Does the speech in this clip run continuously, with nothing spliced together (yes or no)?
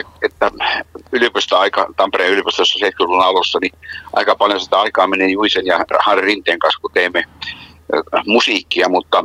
yes